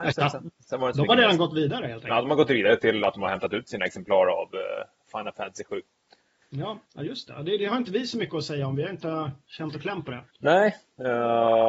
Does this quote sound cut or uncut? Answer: cut